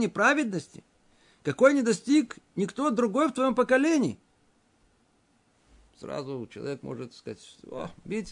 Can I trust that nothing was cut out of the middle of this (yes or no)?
yes